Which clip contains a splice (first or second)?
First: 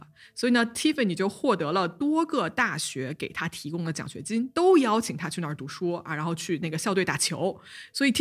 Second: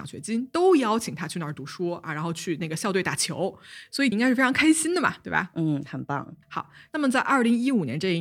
second